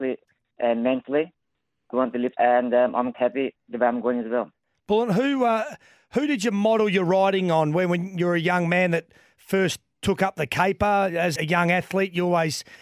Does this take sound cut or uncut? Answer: cut